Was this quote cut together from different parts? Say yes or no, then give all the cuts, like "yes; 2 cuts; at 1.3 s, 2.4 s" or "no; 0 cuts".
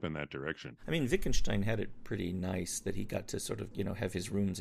yes; 1 cut; at 3.7 s